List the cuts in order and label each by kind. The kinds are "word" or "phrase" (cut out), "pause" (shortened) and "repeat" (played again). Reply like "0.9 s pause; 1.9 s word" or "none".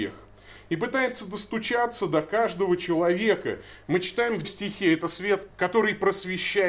4.4 s word; 5.5 s word